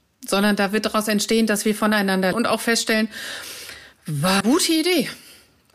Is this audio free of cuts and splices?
no; 2 cuts; at 2.3 s, 4.4 s

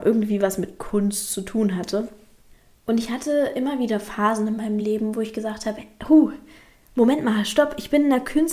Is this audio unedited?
yes; 0 cuts

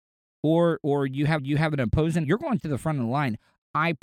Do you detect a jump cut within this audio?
yes; 3 cuts; at 1.4 s, 2.2 s, 2.6 s

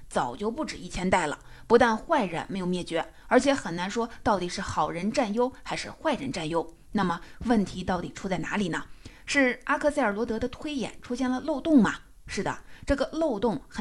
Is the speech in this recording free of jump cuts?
yes; 0 cuts

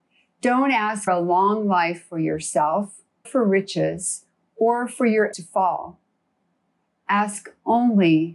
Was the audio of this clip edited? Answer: yes; 3 cuts; at 1.1 s, 3.2 s, 5.3 s

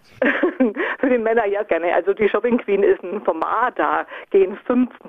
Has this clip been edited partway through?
yes; 1 cut; at 1.7 s

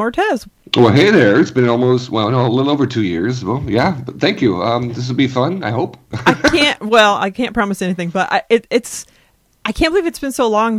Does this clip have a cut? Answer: no; 0 cuts

